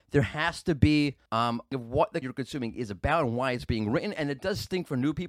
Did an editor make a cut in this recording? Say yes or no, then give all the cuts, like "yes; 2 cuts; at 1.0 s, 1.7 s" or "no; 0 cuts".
yes; 3 cuts; at 1.3 s, 1.7 s, 2.2 s